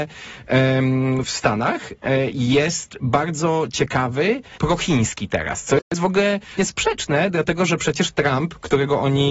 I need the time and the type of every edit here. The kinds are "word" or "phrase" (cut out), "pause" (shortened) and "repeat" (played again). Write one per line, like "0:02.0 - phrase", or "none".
0:01.2 - phrase
0:04.6 - word
0:06.6 - word